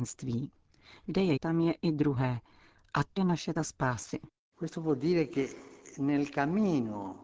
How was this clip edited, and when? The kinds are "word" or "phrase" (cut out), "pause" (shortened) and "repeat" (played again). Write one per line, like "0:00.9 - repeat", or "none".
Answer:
0:01.4 - word
0:03.2 - word
0:03.6 - word